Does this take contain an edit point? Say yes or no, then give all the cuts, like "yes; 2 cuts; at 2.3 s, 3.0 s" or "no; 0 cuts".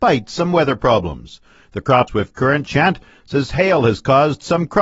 yes; 2 cuts; at 2.1 s, 2.7 s